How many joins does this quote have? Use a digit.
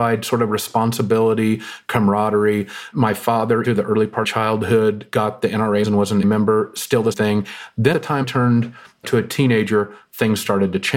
8